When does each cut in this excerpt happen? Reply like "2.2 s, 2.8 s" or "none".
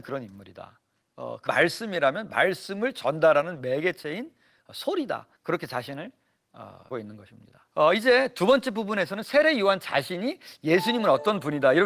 1.5 s, 5.4 s, 6.9 s, 7.7 s